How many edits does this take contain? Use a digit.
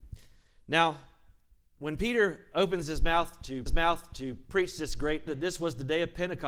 2